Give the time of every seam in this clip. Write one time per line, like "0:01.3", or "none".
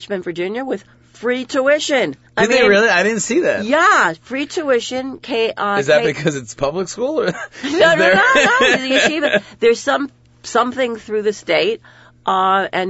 0:02.3